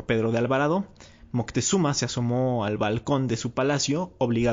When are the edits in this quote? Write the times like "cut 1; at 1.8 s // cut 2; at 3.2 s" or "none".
none